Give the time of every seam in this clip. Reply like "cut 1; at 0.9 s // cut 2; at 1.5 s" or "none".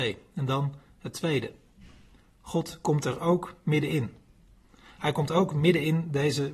none